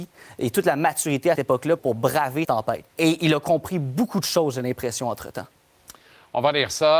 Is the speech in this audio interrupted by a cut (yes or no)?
yes